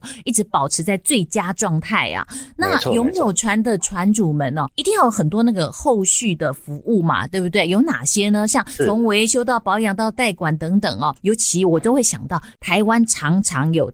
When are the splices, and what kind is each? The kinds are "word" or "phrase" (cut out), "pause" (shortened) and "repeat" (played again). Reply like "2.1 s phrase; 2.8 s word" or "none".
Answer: 4.7 s word; 11.2 s word